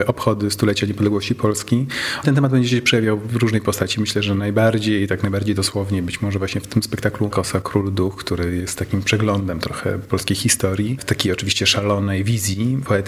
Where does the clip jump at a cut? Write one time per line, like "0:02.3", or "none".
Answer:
0:02.2
0:07.3